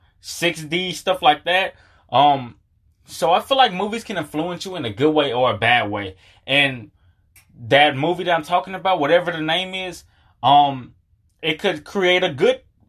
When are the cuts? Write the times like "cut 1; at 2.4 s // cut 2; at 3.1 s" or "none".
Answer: none